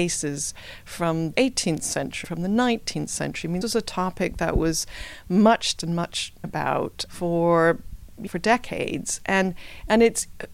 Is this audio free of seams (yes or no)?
no